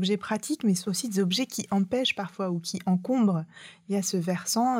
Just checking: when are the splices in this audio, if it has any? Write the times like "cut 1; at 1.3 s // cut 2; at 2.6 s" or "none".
none